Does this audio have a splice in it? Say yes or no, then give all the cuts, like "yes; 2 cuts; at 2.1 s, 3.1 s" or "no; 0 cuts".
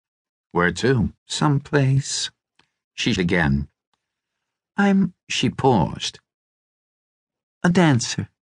yes; 3 cuts; at 1.2 s, 3.2 s, 5.2 s